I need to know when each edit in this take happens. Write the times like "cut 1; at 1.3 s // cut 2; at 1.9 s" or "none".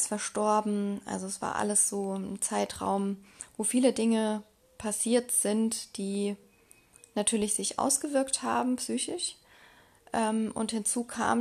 none